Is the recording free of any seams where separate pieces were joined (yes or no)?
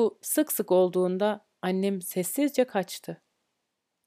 no